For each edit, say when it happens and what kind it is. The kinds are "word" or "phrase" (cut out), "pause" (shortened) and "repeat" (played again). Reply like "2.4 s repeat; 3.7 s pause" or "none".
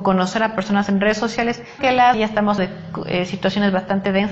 1.8 s word; 2.1 s word; 2.6 s word